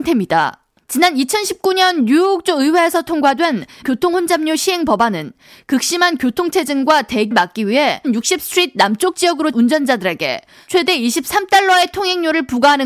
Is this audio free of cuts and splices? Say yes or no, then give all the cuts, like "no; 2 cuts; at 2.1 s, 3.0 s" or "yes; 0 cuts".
no; 4 cuts; at 3.8 s, 7.3 s, 8.0 s, 9.5 s